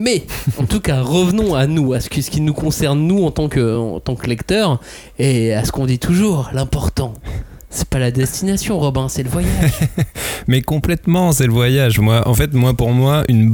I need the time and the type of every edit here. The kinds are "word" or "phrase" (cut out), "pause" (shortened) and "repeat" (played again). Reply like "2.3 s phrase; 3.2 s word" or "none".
none